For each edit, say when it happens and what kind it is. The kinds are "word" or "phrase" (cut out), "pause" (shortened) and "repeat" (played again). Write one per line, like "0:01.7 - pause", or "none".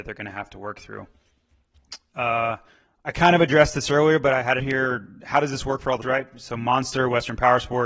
0:02.7 - pause
0:04.6 - word
0:06.0 - word